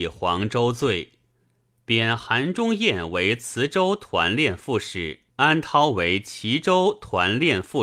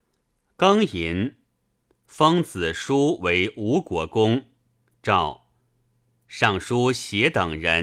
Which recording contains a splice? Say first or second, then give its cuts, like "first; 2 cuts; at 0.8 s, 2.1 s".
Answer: first; 1 cut; at 5.3 s